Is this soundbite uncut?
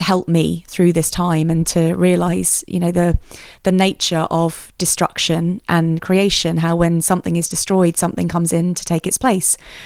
yes; 0 cuts

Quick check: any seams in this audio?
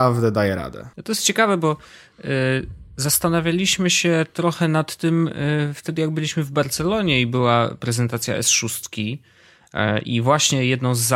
yes; 1 cut; at 0.9 s

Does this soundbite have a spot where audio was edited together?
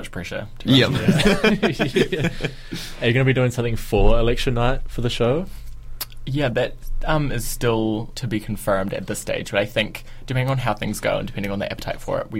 yes; 1 cut; at 8.1 s

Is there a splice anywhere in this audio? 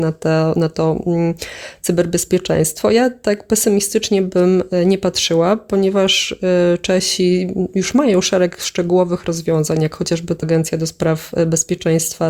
yes; 1 cut; at 10.4 s

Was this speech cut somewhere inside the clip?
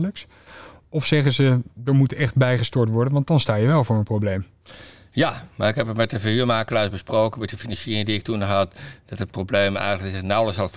no; 0 cuts

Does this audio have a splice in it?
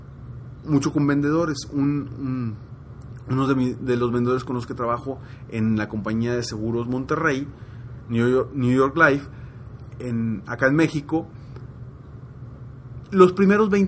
yes; 1 cut; at 9.9 s

